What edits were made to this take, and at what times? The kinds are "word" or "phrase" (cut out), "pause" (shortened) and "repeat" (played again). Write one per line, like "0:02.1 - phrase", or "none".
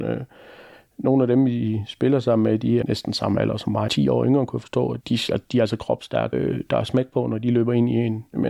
0:02.8 - word
0:03.9 - phrase
0:05.0 - word
0:06.3 - word